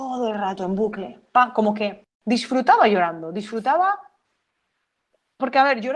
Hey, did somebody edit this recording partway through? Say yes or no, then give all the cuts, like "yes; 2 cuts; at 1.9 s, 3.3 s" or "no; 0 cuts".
no; 0 cuts